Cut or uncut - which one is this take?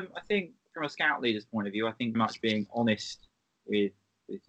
cut